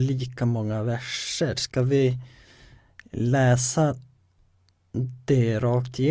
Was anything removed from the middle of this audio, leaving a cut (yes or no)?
no